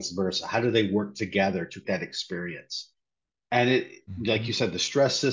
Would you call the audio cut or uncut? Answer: cut